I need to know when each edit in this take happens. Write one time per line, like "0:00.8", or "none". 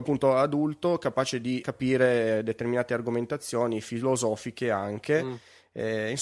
0:01.6